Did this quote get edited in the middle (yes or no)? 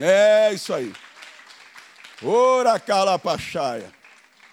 yes